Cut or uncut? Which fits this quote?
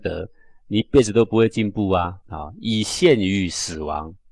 cut